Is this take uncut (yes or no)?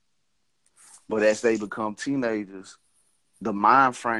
yes